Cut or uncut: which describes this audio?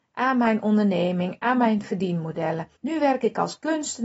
cut